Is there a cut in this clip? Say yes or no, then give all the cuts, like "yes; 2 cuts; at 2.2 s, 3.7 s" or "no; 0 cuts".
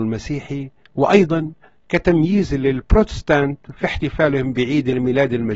no; 0 cuts